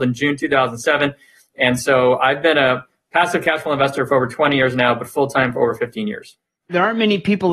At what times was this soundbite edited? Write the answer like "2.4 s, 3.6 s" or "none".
none